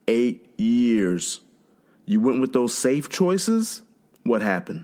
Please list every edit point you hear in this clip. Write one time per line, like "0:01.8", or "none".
none

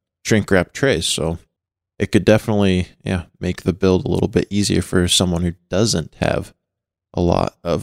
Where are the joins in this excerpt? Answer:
0:01.6

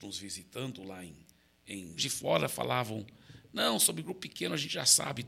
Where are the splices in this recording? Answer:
0:02.0

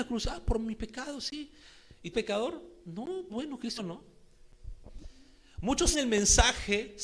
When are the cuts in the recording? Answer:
0:02.1
0:03.3
0:03.8
0:05.9

